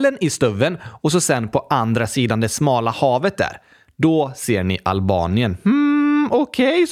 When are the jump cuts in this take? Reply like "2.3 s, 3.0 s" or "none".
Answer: none